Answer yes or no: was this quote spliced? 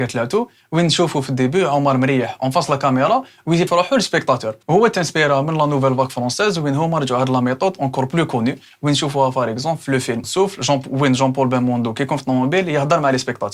yes